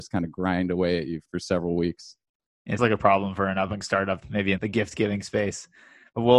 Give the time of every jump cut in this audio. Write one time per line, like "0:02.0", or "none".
0:01.3
0:02.8
0:03.8
0:04.2
0:04.6